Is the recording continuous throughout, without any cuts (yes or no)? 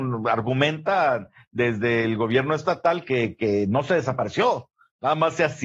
yes